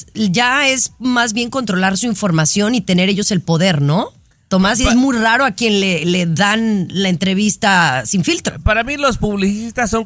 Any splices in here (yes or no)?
no